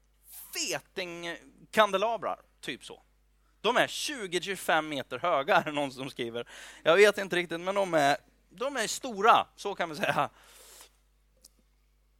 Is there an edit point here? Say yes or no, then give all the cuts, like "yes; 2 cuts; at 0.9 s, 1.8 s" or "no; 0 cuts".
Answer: no; 0 cuts